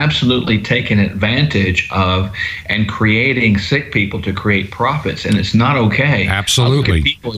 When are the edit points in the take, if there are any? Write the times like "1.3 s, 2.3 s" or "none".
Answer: none

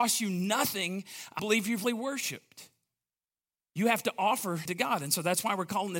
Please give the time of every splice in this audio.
1.4 s, 1.8 s, 4.7 s

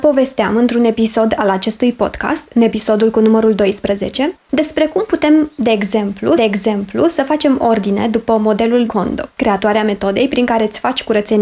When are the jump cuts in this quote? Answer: 4.4 s, 6.4 s, 8.9 s, 9.3 s

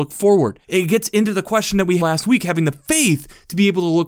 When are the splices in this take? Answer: 2.0 s

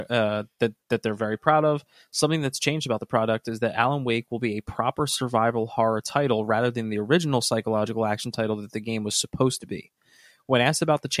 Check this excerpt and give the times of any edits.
none

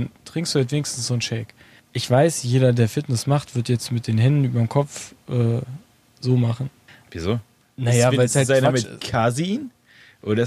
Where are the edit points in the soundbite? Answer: none

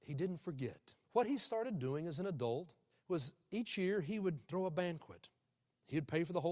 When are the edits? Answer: 1.0 s, 2.9 s, 4.4 s

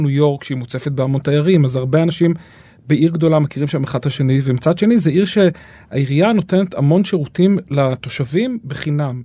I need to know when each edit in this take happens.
none

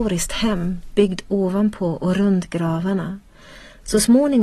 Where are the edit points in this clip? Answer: none

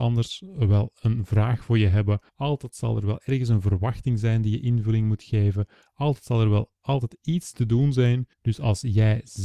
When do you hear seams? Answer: 2.3 s, 8.3 s

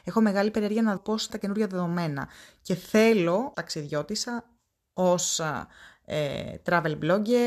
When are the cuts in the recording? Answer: 1.0 s, 1.3 s, 3.5 s

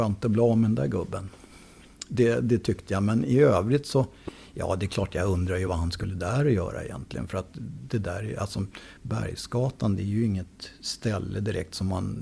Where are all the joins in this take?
none

